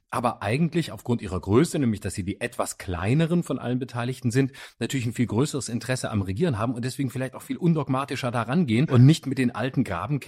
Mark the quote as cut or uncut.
uncut